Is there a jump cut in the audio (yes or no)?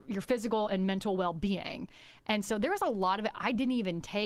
no